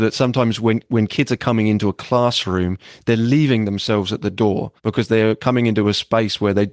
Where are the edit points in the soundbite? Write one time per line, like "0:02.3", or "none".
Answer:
0:04.8